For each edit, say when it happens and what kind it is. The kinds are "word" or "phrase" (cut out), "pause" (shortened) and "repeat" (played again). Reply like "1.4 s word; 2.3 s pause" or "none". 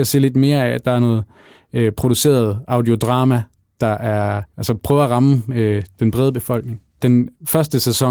none